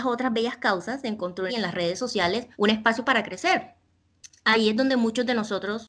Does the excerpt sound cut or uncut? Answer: cut